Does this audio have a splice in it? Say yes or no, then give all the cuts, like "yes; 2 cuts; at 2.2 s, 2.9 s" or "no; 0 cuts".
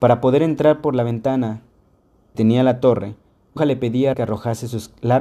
yes; 3 cuts; at 2.3 s, 3.6 s, 4.1 s